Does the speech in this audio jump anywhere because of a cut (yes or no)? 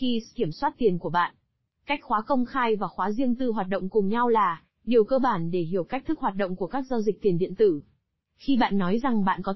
no